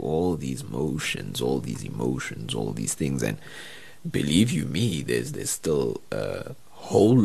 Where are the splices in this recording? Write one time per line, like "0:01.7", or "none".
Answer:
0:04.0
0:05.3

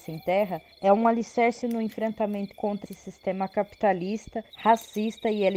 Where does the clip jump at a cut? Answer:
0:01.6
0:02.5
0:02.9
0:04.5

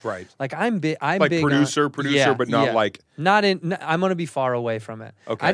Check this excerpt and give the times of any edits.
0:04.3

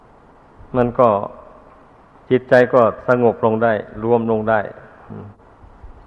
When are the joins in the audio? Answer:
none

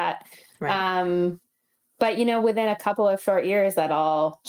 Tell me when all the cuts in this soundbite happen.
none

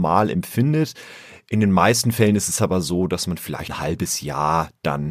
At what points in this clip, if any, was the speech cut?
0:03.7

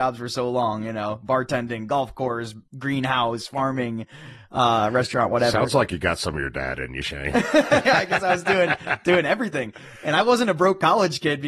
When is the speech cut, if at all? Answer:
none

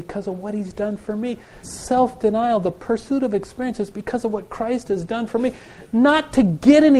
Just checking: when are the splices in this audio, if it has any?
0:01.6

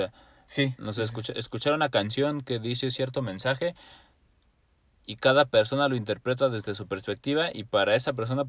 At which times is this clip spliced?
none

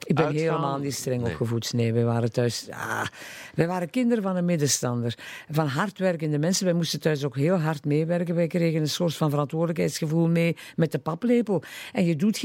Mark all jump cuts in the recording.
none

